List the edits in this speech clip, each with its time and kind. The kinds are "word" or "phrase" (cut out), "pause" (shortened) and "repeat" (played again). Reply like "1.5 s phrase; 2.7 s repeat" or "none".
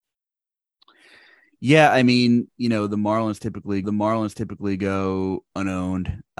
3.8 s repeat